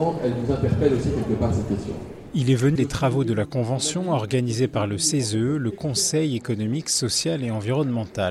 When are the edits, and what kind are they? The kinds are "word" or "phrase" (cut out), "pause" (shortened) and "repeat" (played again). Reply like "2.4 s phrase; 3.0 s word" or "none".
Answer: 2.8 s word

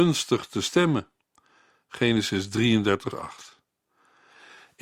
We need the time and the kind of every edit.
3.1 s word

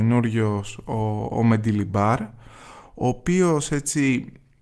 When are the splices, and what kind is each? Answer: none

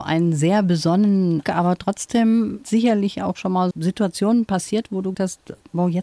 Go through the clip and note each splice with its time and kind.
1.4 s word; 2.6 s word; 3.7 s word; 5.1 s word

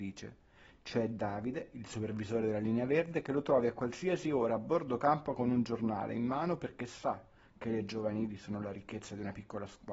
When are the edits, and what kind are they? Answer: none

